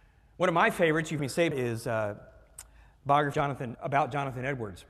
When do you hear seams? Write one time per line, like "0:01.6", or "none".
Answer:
0:01.2
0:01.5
0:03.3
0:03.8